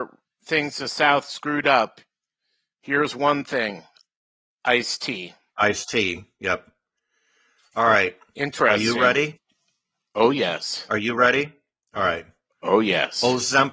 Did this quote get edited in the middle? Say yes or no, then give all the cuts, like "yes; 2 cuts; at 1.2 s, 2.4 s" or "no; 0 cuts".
no; 0 cuts